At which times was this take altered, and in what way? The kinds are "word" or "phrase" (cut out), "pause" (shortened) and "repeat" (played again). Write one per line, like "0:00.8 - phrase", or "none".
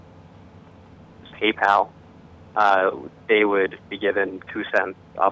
0:01.3 - word
0:03.2 - pause
0:03.9 - pause

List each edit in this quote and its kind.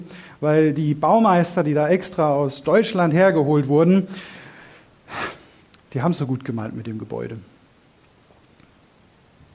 0:05.6 - pause
0:06.2 - phrase

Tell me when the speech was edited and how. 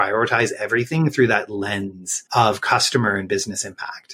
0:02.3 - pause

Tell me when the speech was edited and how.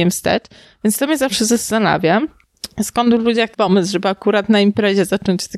0:03.5 - word

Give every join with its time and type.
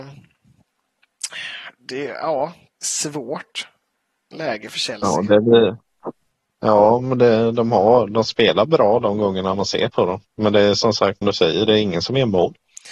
0:11.2 - word

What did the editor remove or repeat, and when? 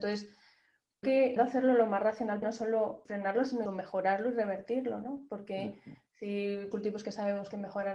0:01.0 - word
0:01.4 - word
0:02.4 - word
0:03.1 - word
0:03.7 - word
0:06.7 - word

